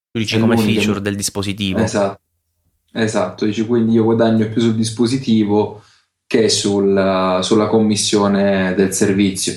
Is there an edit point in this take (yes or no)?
no